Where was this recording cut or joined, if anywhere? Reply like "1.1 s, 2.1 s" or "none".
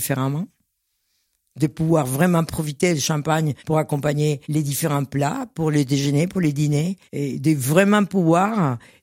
3.6 s, 4.4 s, 7.1 s